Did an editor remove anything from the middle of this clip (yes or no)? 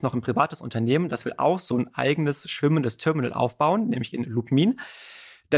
no